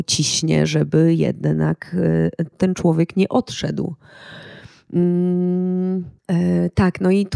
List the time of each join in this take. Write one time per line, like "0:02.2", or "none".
0:02.5
0:06.2

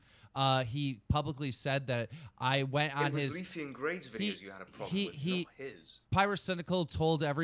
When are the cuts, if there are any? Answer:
0:06.0

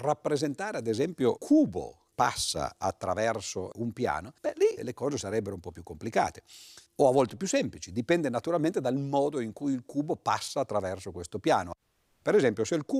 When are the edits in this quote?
0:01.4
0:02.1
0:03.7
0:04.4
0:04.8
0:06.9

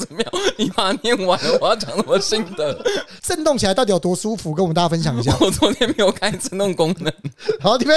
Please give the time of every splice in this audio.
0:03.2

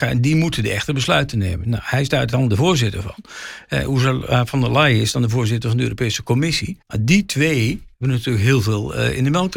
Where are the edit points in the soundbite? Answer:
0:06.8
0:07.9

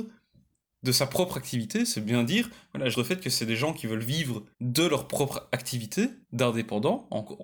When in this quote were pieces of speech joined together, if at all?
0:02.9
0:04.5
0:06.2

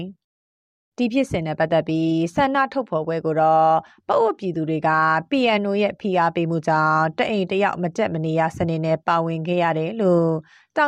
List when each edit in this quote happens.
none

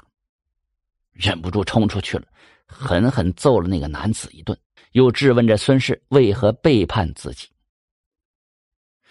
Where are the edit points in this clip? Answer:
0:04.8

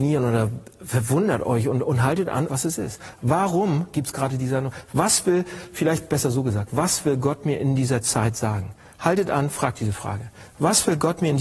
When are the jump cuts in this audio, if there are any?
0:02.5

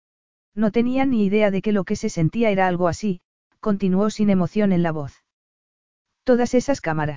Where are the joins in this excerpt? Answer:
none

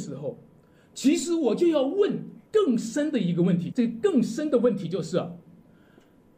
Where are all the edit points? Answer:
0:02.5
0:03.7

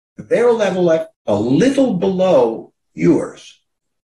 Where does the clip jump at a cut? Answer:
0:01.1

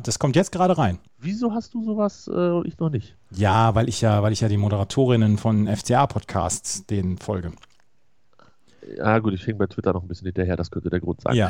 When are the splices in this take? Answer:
0:01.1

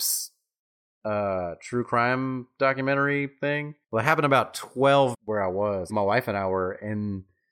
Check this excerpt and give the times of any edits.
0:03.8
0:05.1
0:05.9

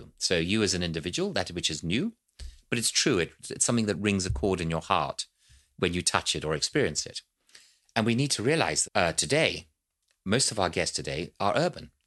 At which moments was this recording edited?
0:08.8

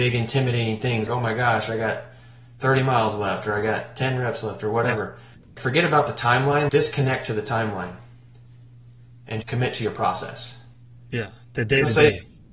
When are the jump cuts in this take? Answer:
0:01.1
0:05.6
0:06.7
0:09.4

